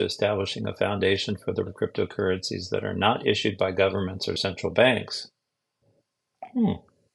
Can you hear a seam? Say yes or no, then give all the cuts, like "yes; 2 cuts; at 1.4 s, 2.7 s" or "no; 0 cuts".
yes; 1 cut; at 1.7 s